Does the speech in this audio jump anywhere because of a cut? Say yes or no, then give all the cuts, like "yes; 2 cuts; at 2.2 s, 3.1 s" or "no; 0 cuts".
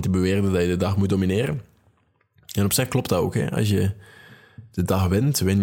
no; 0 cuts